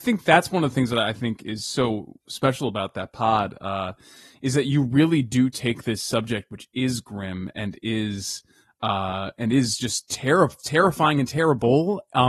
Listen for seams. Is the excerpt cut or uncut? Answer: uncut